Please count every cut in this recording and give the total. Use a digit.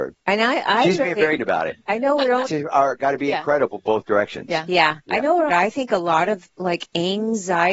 4